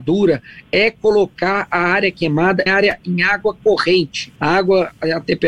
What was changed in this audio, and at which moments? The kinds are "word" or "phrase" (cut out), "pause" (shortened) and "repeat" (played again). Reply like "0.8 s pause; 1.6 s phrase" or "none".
2.7 s word; 4.4 s pause